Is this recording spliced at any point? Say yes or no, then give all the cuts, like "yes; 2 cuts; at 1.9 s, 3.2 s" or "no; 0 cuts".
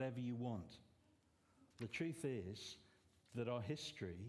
yes; 1 cut; at 1.7 s